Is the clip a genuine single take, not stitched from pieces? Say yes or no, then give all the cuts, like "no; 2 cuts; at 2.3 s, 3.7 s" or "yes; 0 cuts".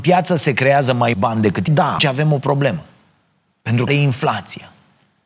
no; 4 cuts; at 1.1 s, 1.7 s, 2.0 s, 3.9 s